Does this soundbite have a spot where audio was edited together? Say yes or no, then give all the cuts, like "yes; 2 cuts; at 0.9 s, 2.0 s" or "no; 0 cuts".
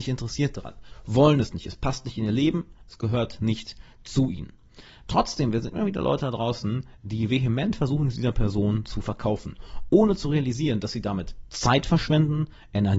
no; 0 cuts